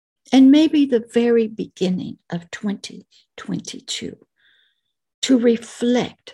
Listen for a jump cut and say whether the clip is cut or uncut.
uncut